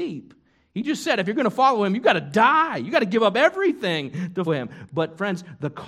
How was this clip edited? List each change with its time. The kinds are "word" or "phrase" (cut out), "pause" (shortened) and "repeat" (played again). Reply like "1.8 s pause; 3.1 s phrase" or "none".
4.5 s word

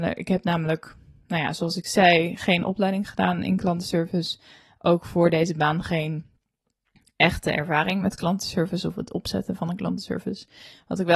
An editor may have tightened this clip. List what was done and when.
none

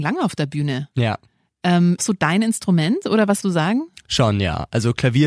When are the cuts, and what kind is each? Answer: 2.0 s phrase; 3.4 s word

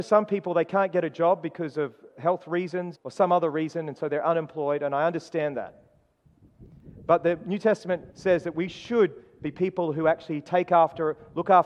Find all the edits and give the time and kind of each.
2.9 s word; 8.1 s pause

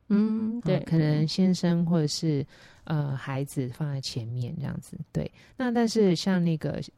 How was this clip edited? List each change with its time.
5.1 s word

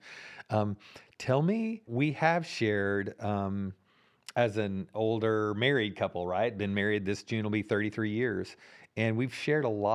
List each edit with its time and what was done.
1.9 s word

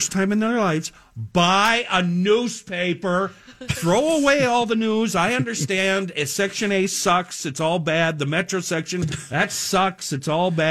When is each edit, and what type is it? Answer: none

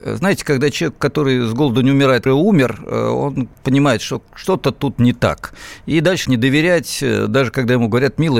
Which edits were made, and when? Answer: 2.3 s phrase; 6.2 s word

